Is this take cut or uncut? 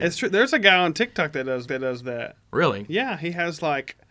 cut